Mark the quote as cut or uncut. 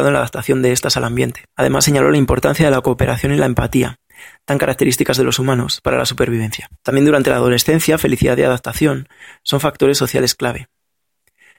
cut